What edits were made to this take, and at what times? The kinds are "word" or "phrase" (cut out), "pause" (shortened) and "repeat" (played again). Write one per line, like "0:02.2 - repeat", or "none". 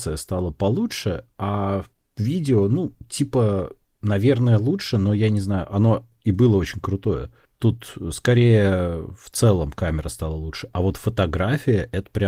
none